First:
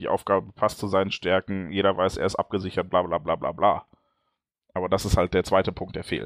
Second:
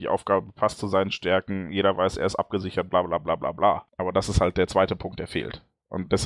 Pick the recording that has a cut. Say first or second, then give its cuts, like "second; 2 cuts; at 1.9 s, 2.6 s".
second; 1 cut; at 3.9 s